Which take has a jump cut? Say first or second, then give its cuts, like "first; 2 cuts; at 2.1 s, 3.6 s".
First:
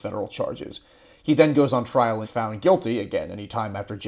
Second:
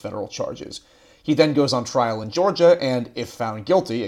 first; 1 cut; at 2.2 s